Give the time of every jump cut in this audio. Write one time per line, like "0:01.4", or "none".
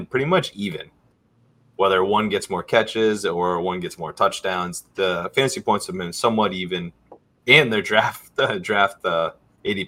none